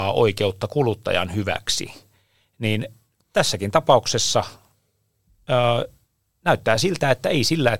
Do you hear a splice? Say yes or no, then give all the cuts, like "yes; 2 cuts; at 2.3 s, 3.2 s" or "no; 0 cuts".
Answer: no; 0 cuts